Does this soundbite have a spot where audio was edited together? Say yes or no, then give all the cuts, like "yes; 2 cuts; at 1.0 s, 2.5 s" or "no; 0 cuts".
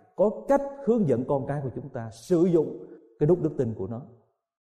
no; 0 cuts